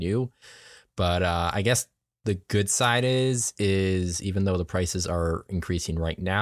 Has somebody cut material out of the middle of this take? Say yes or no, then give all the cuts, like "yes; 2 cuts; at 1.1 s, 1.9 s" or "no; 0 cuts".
no; 0 cuts